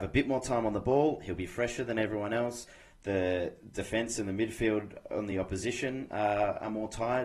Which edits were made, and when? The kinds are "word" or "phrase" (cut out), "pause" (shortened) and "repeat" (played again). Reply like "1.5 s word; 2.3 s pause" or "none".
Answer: none